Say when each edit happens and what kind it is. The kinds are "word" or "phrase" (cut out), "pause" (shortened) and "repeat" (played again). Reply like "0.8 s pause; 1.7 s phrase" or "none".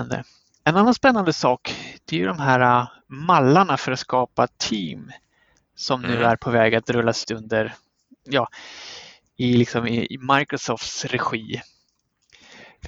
7.2 s word